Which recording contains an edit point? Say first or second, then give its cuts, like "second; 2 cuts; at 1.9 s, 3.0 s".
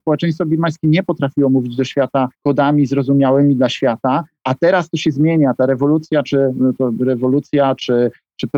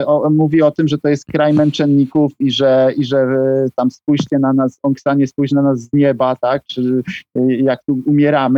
first; 1 cut; at 2.3 s